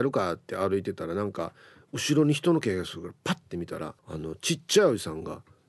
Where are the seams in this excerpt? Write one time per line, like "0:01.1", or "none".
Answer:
0:04.0